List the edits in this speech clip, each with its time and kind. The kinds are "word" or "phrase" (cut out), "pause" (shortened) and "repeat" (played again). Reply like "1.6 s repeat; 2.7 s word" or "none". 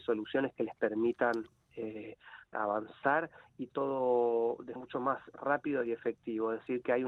2.5 s word; 3.7 s word; 4.8 s word